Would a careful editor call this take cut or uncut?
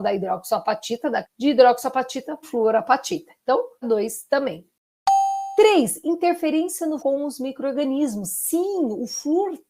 cut